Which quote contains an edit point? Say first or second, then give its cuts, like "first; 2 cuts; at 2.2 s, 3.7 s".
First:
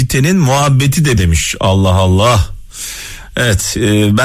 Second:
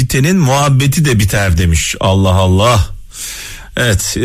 first; 1 cut; at 1.2 s